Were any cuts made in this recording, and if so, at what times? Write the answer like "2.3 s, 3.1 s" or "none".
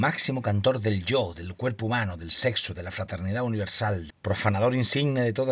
4.1 s